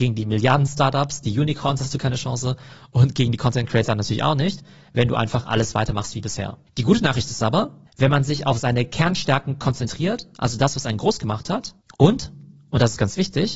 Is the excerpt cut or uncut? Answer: uncut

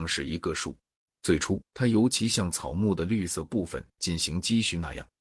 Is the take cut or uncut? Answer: cut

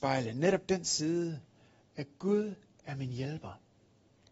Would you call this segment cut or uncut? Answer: uncut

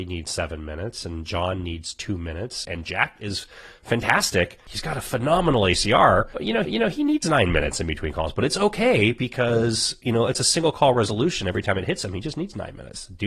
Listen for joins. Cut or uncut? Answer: cut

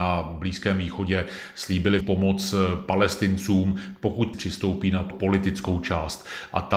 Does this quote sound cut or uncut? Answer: cut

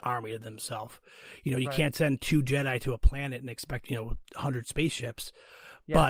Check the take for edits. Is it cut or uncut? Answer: cut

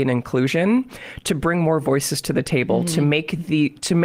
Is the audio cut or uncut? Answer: uncut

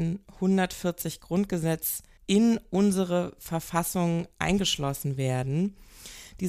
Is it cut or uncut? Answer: uncut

